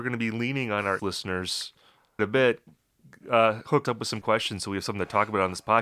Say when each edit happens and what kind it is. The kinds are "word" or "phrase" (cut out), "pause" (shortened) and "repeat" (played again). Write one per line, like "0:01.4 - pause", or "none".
0:01.0 - word
0:02.2 - word
0:03.8 - word
0:04.2 - word

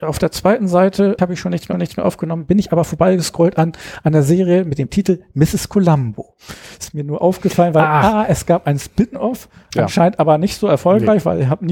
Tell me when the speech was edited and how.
0:01.2 - word
0:01.7 - repeat

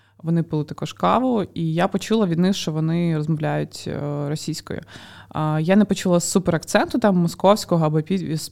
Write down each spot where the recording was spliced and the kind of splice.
none

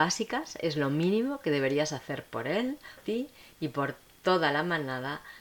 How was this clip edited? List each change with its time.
0:03.0 - word

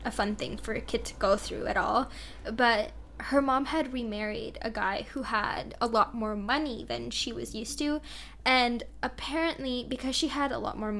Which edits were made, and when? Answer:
none

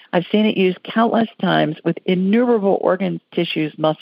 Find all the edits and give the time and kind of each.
none

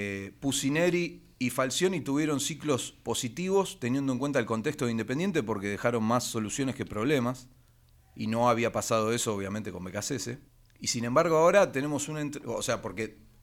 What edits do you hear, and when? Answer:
0:01.3 - pause
0:07.7 - pause
0:10.5 - pause

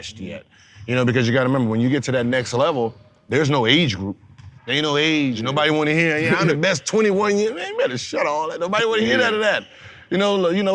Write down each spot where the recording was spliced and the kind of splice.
0:04.6 - pause

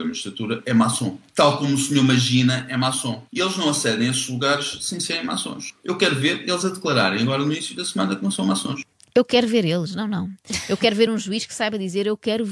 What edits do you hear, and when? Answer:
none

